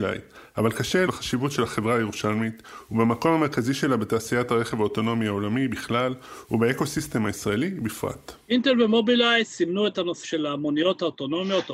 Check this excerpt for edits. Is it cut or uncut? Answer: cut